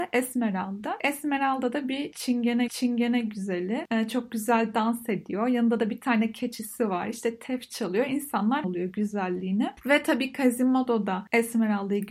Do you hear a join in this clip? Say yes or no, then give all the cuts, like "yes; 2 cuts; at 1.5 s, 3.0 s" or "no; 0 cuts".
yes; 2 cuts; at 2.7 s, 8.6 s